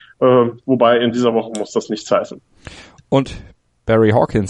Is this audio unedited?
yes; 0 cuts

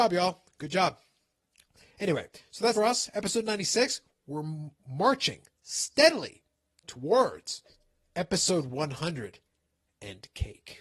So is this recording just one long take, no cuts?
no; 1 cut; at 2.7 s

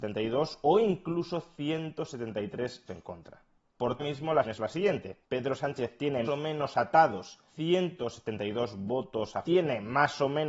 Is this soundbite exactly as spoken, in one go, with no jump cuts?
no; 7 cuts; at 2.9 s, 4.0 s, 4.4 s, 5.2 s, 6.2 s, 7.5 s, 9.4 s

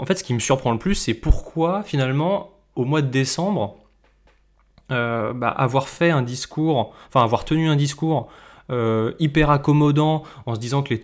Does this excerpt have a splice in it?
no; 0 cuts

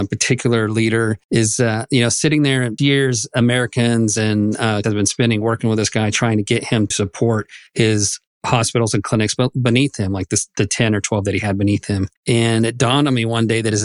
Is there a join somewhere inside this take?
yes; 6 cuts; at 1.2 s, 2.8 s, 4.8 s, 6.9 s, 7.7 s, 12.2 s

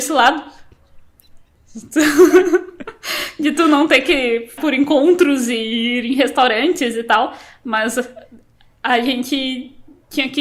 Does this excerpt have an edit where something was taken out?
yes; 1 cut; at 4.6 s

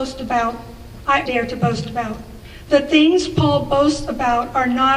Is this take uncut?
no; 1 cut; at 1.3 s

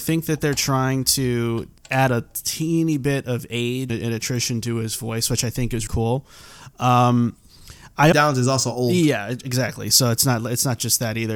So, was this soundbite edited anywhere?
yes; 4 cuts; at 1.8 s, 3.9 s, 5.9 s, 8.1 s

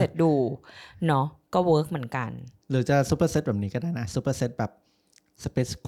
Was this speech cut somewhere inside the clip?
no; 0 cuts

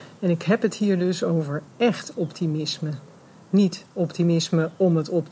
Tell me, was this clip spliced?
no; 0 cuts

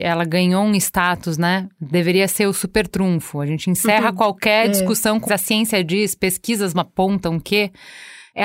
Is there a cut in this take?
yes; 1 cut; at 5.2 s

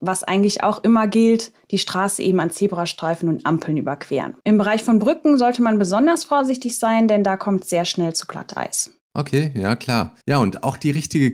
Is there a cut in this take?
yes; 2 cuts; at 4.4 s, 10.2 s

